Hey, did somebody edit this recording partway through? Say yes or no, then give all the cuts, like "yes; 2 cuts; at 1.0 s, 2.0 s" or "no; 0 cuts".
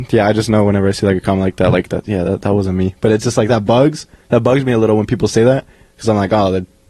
no; 0 cuts